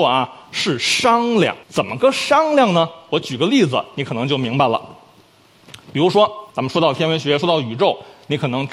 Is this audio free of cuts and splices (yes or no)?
no